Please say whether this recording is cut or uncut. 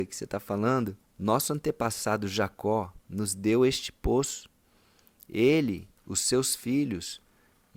cut